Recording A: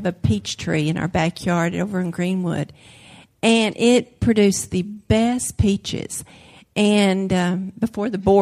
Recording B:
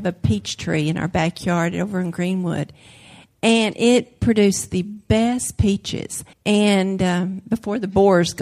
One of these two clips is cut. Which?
B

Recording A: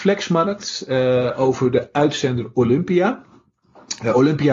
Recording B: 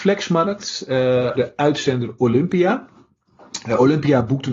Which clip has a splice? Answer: B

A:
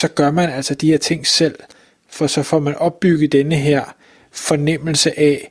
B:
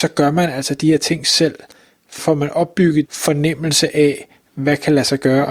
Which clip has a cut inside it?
B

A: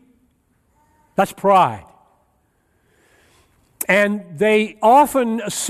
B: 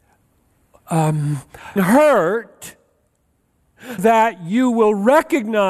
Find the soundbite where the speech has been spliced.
B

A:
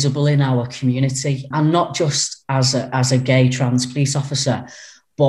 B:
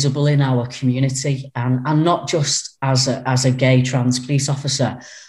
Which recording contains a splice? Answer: A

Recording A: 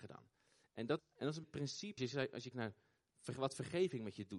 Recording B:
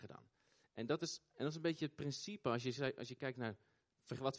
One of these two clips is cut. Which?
A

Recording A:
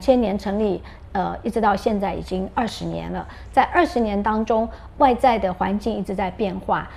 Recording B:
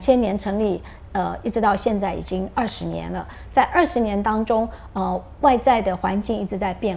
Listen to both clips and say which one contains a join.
A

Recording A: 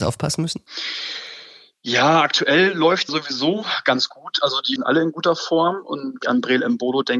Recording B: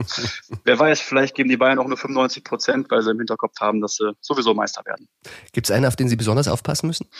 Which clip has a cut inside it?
A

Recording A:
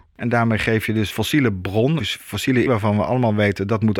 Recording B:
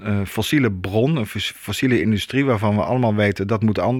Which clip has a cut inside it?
A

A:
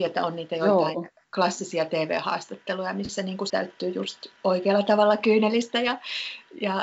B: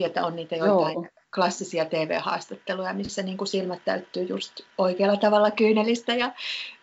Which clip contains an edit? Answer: A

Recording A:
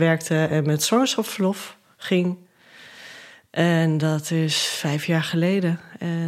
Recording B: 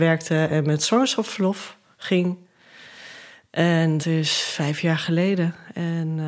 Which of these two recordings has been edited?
B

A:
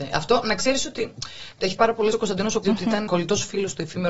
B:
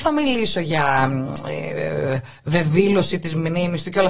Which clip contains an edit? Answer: A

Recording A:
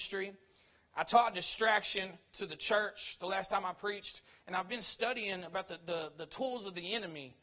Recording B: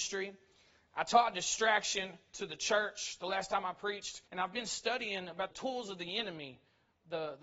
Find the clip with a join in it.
B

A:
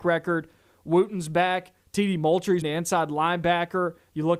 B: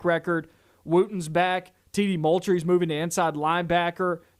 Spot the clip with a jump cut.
A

